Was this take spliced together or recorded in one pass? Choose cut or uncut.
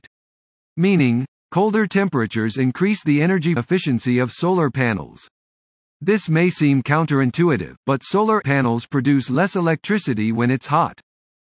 cut